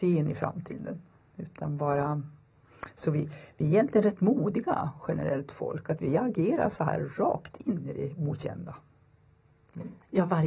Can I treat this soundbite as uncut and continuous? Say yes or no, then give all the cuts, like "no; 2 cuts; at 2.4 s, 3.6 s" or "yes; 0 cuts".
yes; 0 cuts